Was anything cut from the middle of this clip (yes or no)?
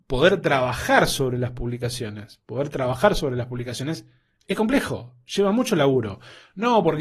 no